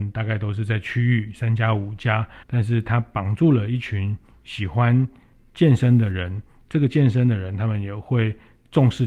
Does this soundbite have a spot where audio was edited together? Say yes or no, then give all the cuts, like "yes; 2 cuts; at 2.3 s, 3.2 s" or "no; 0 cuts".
yes; 1 cut; at 2.4 s